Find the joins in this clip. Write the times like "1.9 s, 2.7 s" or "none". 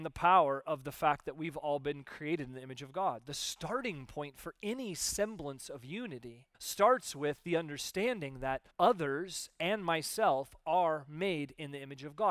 6.5 s, 8.7 s

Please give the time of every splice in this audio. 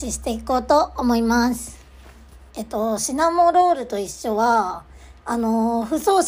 2.5 s

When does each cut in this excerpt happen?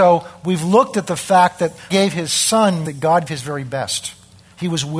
1.9 s, 2.8 s, 3.3 s

